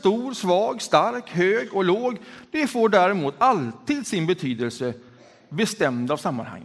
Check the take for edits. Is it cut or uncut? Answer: uncut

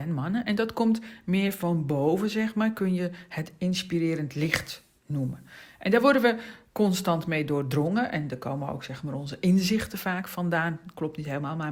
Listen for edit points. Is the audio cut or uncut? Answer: uncut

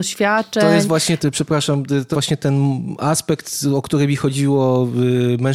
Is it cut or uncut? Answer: cut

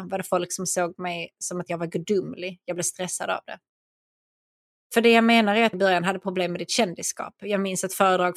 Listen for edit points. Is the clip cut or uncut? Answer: cut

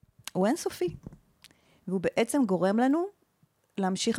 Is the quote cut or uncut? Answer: uncut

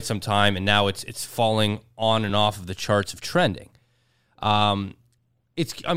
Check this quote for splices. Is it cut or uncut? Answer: uncut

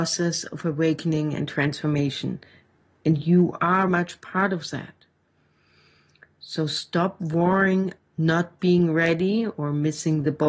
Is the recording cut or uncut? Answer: cut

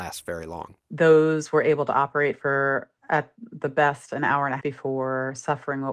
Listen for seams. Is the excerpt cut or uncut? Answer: cut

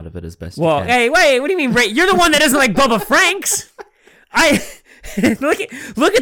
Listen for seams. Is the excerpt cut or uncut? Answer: uncut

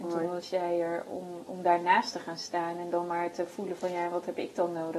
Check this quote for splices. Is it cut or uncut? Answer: cut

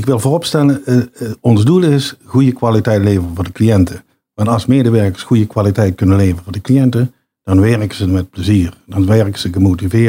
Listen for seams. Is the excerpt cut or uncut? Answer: uncut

